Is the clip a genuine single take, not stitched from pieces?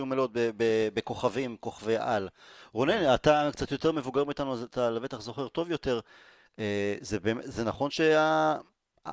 yes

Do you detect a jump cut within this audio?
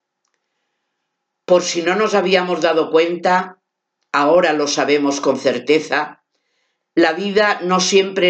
no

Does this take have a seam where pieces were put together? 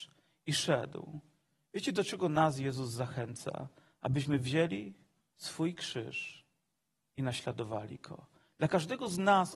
no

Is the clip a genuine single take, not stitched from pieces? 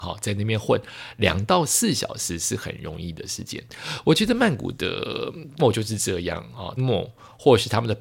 no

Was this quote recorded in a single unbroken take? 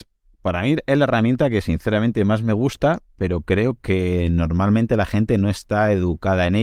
yes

